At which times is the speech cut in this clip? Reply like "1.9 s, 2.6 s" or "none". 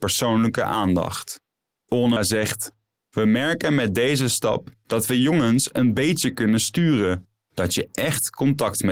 2.2 s